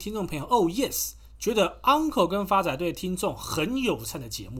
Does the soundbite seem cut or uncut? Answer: uncut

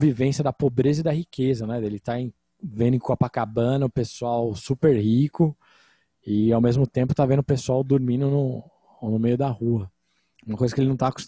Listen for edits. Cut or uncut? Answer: uncut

